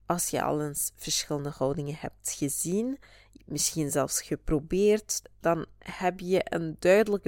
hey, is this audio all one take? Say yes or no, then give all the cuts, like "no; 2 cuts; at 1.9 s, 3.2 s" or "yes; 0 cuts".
yes; 0 cuts